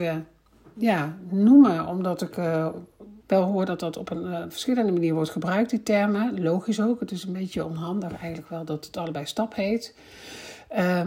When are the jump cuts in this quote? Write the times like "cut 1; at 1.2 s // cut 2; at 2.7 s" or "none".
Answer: cut 1; at 3.2 s